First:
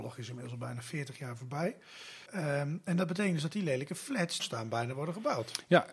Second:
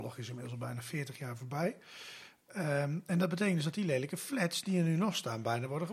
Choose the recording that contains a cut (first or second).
first